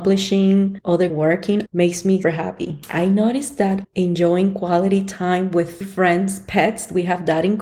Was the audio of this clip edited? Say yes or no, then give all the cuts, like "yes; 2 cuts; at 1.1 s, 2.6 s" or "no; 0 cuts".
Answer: yes; 5 cuts; at 1.1 s, 1.7 s, 2.2 s, 3.8 s, 5.8 s